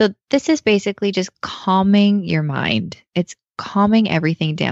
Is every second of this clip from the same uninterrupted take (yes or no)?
yes